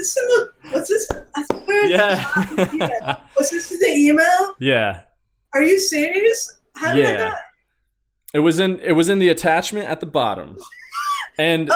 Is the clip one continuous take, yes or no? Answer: yes